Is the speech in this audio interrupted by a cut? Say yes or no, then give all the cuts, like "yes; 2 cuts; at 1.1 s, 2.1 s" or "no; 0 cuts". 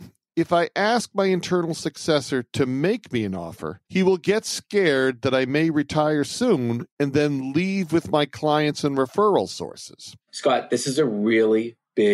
yes; 2 cuts; at 3.9 s, 10.2 s